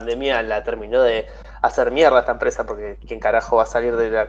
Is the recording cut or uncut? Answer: cut